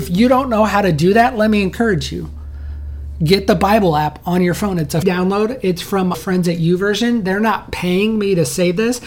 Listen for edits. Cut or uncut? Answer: cut